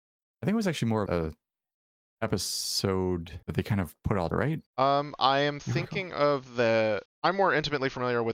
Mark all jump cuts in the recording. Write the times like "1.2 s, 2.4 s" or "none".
1.1 s, 3.4 s, 4.3 s, 4.7 s, 7.1 s